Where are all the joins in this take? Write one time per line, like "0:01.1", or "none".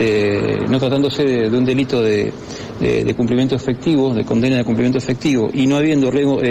none